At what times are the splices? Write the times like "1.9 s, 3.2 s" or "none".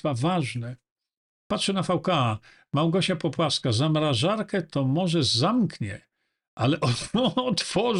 none